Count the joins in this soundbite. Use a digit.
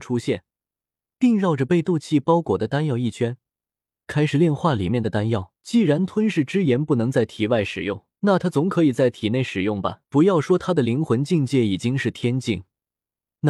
3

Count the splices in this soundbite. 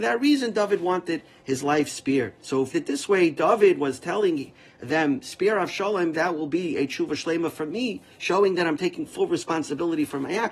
3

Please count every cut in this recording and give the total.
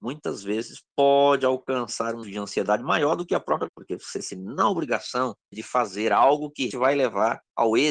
5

